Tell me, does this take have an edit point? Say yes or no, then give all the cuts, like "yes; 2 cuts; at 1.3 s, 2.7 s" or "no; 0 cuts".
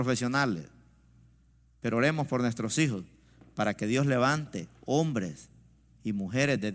no; 0 cuts